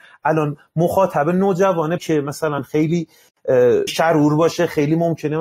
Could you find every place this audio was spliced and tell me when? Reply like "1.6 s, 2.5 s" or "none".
2.0 s, 3.9 s

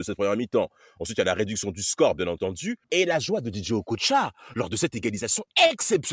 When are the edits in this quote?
2.8 s

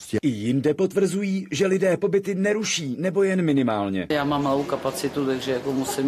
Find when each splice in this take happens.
none

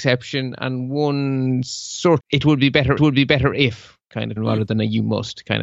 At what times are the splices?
2.2 s, 3.0 s, 4.4 s

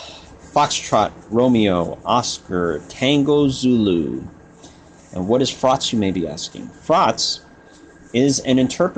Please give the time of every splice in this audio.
none

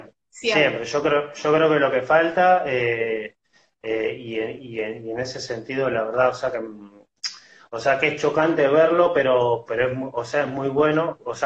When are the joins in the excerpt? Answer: none

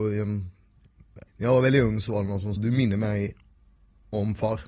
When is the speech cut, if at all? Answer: 1.3 s, 2.6 s

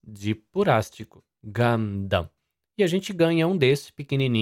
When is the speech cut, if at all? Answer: 1.3 s

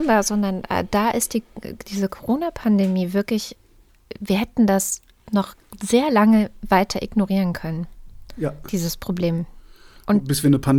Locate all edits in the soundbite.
none

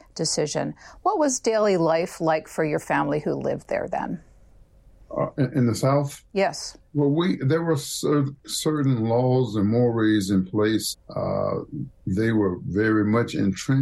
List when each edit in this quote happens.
6.9 s, 10.9 s

